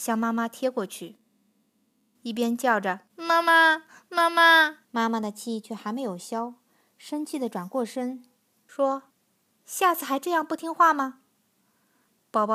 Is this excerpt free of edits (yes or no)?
no